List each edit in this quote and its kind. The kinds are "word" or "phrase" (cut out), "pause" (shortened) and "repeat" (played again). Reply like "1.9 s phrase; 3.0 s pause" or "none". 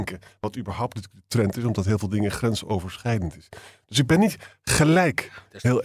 none